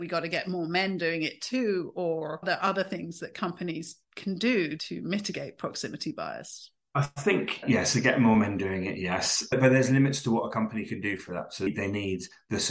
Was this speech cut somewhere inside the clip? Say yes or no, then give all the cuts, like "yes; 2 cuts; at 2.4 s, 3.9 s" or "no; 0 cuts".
no; 0 cuts